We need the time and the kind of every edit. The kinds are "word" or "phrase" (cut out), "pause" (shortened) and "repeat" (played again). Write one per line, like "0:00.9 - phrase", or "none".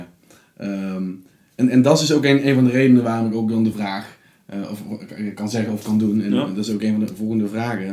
0:03.7 - word